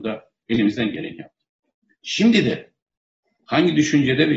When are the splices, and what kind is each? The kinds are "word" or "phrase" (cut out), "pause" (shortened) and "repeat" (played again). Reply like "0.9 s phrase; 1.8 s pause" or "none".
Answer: none